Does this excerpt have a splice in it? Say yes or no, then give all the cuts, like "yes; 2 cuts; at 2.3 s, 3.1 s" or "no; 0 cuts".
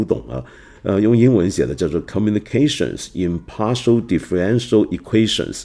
no; 0 cuts